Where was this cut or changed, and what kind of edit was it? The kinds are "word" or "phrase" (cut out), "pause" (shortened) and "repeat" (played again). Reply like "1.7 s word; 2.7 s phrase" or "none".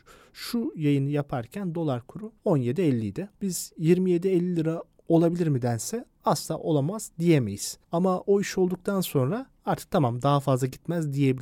2.4 s pause; 3.3 s pause; 7.8 s pause